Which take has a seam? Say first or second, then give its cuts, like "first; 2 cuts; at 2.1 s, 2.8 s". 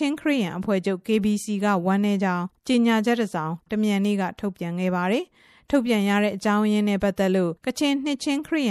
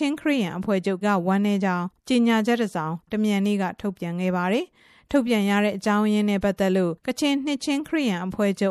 second; 1 cut; at 1.0 s